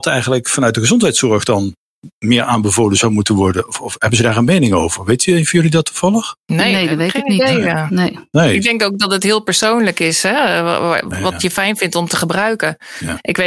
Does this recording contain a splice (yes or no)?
yes